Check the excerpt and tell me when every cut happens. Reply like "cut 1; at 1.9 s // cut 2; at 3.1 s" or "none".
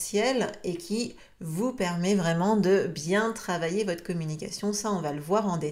none